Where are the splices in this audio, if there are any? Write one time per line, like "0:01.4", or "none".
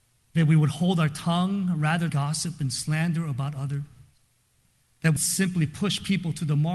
0:02.1
0:05.2